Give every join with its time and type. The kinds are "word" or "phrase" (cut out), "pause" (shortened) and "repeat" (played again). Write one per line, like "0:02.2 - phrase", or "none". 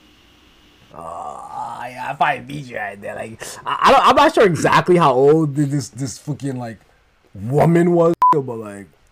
none